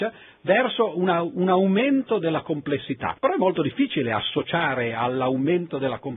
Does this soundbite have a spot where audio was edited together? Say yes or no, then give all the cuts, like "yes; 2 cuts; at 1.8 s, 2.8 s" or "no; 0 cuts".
yes; 1 cut; at 3.2 s